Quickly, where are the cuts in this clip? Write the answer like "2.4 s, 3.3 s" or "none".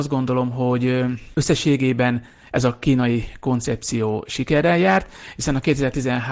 none